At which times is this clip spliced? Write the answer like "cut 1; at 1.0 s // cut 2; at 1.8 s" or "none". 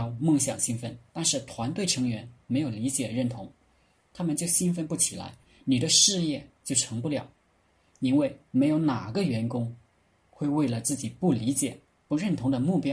none